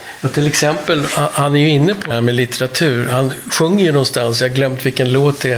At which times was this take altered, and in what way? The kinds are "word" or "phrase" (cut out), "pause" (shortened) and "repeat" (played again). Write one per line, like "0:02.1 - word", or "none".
0:02.1 - word